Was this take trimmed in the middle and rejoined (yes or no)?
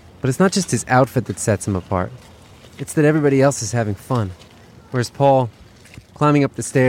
no